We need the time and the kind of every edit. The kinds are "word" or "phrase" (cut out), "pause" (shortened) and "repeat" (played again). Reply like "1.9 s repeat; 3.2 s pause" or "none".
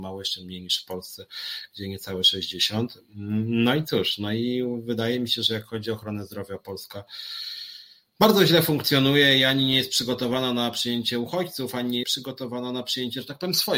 12.0 s word